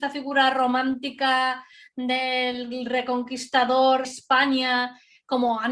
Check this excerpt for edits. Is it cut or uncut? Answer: cut